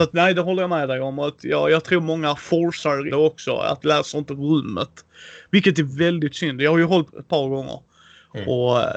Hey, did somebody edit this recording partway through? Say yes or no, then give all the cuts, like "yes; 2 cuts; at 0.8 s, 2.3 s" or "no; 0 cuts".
yes; 2 cuts; at 3.1 s, 7.1 s